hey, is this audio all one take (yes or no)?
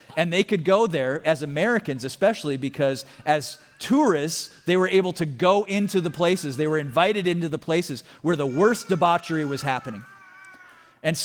no